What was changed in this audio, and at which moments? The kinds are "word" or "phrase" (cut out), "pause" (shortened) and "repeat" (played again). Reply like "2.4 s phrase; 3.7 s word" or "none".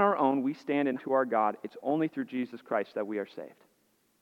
1.0 s word